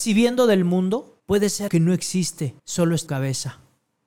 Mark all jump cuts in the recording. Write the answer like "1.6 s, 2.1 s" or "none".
1.2 s, 1.7 s, 2.6 s, 3.1 s